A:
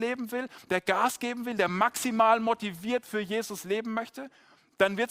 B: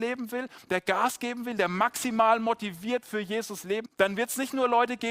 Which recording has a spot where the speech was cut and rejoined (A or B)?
B